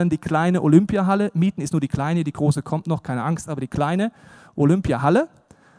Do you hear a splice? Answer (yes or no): no